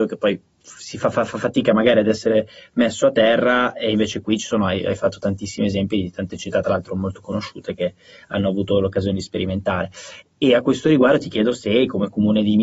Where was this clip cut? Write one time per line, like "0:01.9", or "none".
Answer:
none